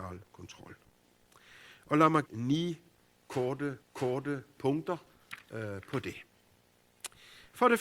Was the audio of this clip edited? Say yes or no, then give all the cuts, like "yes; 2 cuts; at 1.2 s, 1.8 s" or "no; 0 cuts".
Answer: yes; 2 cuts; at 2.2 s, 3.8 s